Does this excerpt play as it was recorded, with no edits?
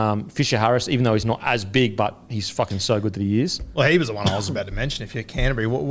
yes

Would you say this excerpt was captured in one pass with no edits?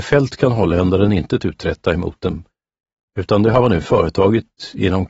yes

